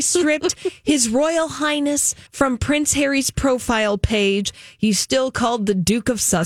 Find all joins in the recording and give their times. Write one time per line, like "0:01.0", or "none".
0:02.3